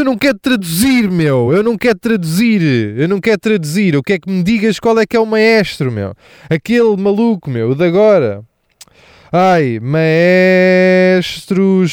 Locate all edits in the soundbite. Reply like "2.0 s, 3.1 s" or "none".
none